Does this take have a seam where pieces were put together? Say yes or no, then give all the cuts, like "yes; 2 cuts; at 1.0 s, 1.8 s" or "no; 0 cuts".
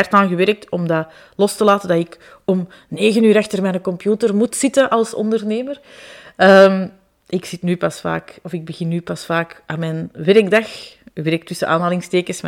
no; 0 cuts